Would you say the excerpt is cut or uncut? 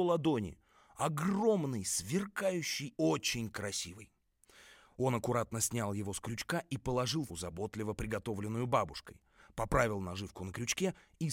cut